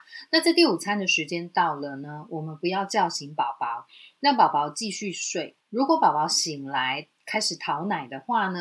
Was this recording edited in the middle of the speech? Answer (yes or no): yes